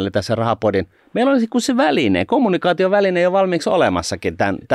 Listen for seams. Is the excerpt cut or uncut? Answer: uncut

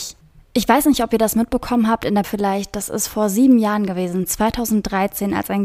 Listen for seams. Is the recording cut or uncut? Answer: cut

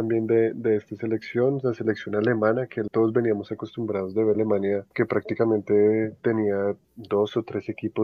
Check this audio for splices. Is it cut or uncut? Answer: cut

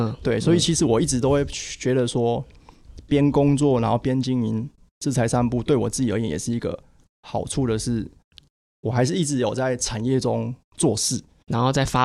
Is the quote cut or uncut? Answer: uncut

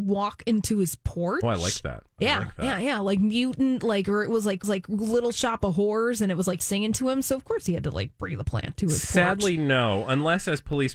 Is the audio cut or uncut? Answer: cut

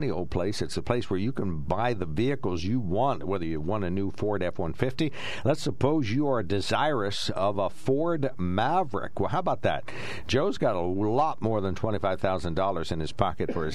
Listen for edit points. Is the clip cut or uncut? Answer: uncut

